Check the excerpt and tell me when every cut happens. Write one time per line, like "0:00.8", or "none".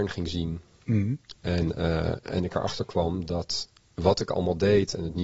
none